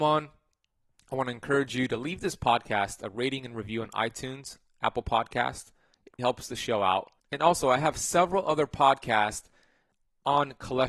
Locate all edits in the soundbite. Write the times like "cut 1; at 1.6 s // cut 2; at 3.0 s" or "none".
cut 1; at 6.2 s // cut 2; at 7.2 s

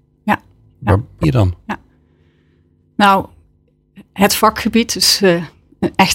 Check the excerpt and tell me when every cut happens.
cut 1; at 1.2 s

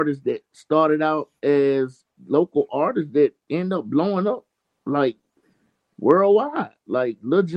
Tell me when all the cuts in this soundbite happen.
none

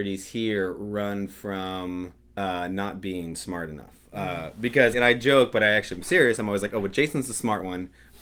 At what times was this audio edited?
cut 1; at 2.2 s // cut 2; at 4.9 s

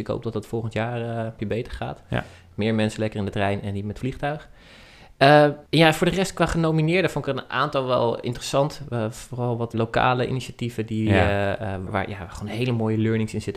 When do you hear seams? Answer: cut 1; at 1.4 s // cut 2; at 5.7 s // cut 3; at 9.7 s // cut 4; at 11.9 s

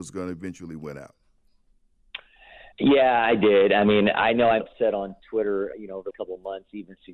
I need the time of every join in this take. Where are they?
cut 1; at 2.7 s // cut 2; at 4.6 s // cut 3; at 5.7 s // cut 4; at 6.1 s

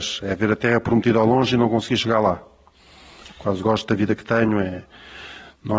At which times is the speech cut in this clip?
none

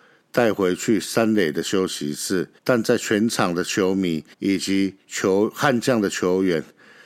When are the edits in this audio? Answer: cut 1; at 2.6 s // cut 2; at 4.3 s

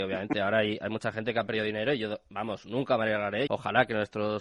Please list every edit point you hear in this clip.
cut 1; at 3.5 s

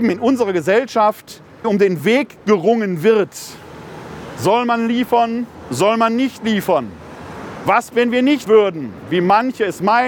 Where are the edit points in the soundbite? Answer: cut 1; at 1.6 s // cut 2; at 7.9 s // cut 3; at 8.5 s

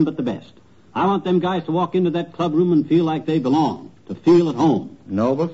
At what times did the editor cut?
cut 1; at 4.0 s

